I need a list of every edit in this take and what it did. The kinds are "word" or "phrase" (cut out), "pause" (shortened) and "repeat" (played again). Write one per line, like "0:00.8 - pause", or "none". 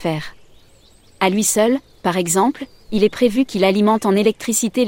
none